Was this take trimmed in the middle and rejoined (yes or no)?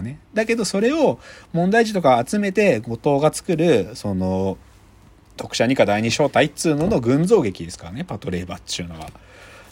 no